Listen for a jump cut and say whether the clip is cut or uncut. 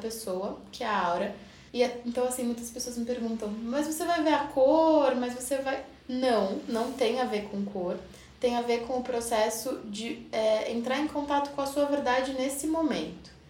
cut